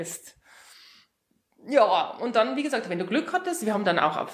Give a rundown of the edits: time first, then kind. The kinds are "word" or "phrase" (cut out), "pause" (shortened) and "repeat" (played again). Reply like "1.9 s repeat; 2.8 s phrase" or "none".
none